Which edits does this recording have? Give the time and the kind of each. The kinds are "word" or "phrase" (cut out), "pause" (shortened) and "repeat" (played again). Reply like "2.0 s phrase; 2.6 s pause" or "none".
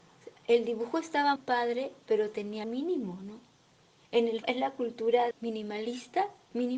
1.4 s word; 2.6 s word; 4.4 s word; 5.3 s word